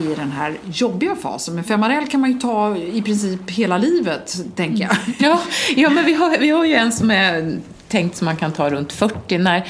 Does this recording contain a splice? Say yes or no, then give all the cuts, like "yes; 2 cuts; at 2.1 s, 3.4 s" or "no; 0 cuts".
no; 0 cuts